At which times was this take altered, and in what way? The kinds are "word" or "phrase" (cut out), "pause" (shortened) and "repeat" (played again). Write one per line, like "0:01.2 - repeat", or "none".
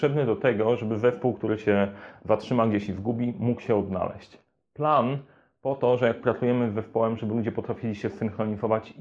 none